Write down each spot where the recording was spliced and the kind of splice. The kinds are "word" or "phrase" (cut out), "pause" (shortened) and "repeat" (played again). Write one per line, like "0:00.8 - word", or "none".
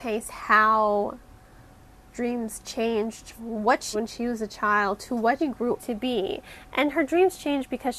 0:02.1 - word
0:03.4 - word
0:03.9 - word
0:05.4 - word
0:05.8 - word